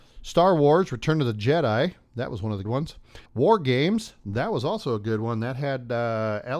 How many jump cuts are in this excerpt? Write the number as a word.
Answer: two